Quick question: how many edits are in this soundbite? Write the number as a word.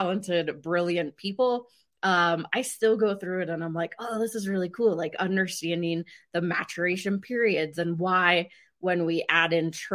zero